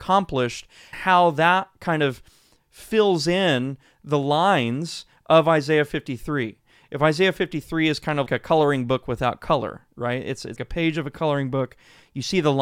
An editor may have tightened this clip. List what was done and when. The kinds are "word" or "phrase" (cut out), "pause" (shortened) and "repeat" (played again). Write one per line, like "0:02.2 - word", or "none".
0:00.9 - word
0:08.3 - word
0:10.6 - word